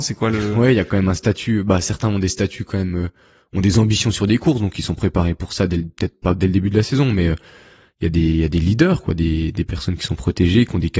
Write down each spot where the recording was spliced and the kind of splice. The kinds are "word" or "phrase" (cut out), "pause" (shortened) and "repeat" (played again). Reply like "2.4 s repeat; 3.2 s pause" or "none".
none